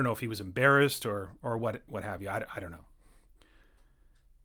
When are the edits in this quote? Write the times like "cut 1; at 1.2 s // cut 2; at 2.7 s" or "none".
none